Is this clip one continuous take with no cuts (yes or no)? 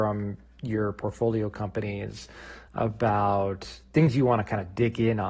yes